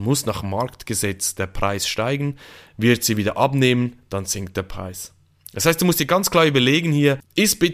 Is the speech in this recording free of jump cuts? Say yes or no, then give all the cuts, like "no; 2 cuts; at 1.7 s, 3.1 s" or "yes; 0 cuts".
yes; 0 cuts